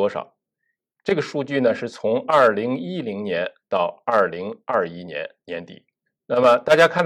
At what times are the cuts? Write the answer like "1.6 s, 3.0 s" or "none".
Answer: none